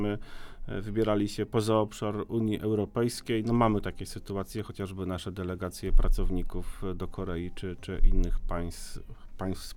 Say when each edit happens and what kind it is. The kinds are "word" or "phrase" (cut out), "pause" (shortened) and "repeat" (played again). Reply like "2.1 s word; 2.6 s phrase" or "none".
none